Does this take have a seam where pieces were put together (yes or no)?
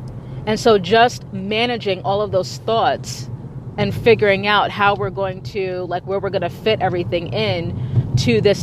no